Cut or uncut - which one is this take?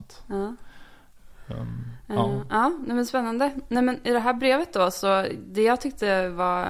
uncut